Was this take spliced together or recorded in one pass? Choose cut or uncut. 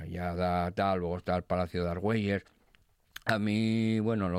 uncut